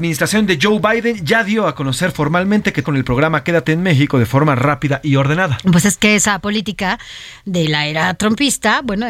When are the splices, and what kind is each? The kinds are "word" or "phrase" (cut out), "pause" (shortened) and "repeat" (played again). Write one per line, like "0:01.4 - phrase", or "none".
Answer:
0:02.8 - word